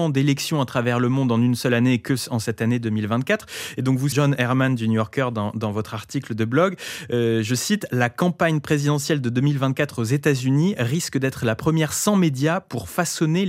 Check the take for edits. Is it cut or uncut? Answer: cut